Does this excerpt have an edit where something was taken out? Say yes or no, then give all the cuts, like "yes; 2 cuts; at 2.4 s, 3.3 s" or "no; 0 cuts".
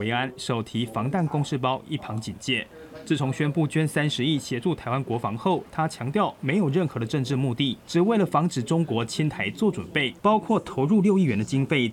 yes; 2 cuts; at 7.8 s, 10.2 s